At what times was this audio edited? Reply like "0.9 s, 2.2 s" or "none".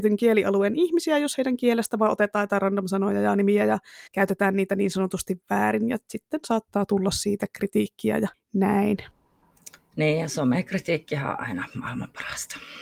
4.1 s, 8.3 s